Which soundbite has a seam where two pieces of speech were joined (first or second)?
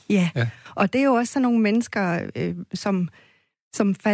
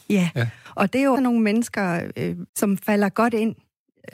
second